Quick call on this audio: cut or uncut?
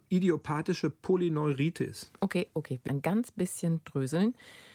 cut